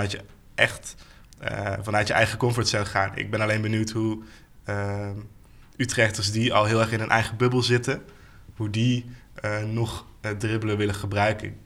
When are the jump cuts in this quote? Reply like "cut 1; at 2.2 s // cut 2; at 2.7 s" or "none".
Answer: none